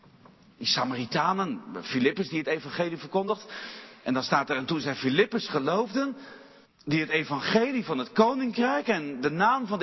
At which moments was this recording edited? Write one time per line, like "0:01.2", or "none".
0:06.6